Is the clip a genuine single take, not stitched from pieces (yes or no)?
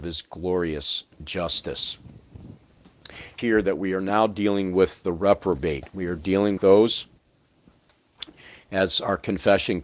no